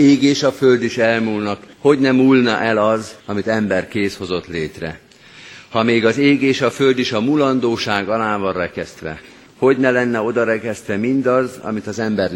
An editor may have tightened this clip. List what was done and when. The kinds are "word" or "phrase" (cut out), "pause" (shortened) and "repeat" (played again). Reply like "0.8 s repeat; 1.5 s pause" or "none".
1.7 s pause; 3.2 s pause; 9.5 s pause